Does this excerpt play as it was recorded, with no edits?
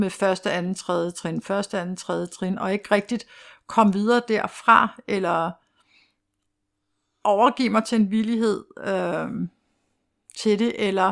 yes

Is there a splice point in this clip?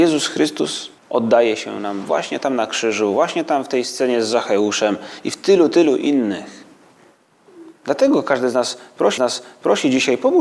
yes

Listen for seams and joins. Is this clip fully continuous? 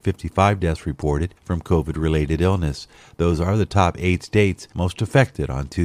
yes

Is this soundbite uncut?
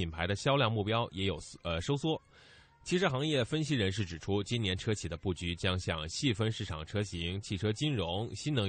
yes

